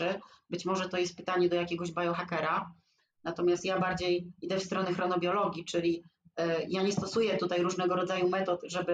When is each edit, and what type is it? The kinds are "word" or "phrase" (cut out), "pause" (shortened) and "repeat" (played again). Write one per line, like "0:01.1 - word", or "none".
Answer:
none